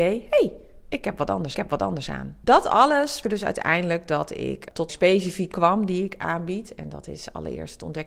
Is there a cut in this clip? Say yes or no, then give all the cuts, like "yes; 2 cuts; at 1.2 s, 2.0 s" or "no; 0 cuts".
yes; 4 cuts; at 1.5 s, 3.2 s, 4.9 s, 5.5 s